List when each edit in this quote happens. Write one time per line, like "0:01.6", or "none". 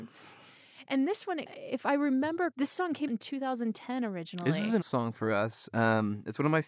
0:02.5
0:03.1
0:04.8

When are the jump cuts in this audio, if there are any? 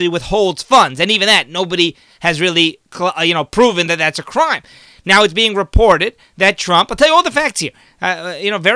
none

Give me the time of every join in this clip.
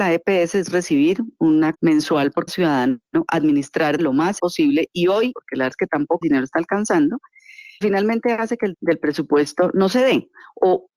0:01.7
0:02.5
0:04.0
0:04.4
0:05.3
0:05.7
0:06.2
0:07.8
0:08.7

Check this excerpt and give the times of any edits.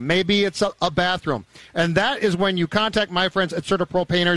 none

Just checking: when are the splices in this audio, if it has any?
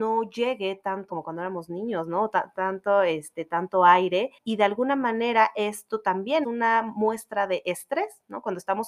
0:01.1
0:04.4
0:06.4

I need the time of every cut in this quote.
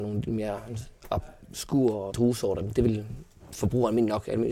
0:02.1

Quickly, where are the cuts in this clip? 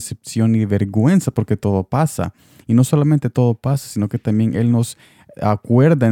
none

